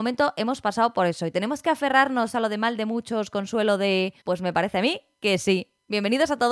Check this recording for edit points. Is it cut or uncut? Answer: cut